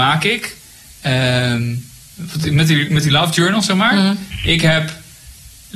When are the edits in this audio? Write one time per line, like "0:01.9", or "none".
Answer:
none